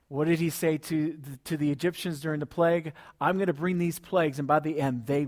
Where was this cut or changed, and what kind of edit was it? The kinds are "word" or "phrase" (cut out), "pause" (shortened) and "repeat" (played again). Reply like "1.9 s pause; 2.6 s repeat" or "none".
none